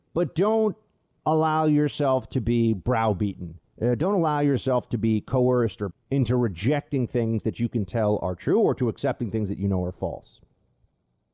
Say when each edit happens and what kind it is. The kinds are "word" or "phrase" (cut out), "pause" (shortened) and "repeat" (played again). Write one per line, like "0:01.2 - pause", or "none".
0:03.7 - pause
0:05.9 - word